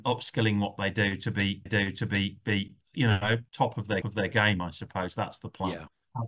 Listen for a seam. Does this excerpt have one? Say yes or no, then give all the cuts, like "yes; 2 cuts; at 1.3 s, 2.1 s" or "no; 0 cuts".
yes; 3 cuts; at 1.7 s, 3.5 s, 4.0 s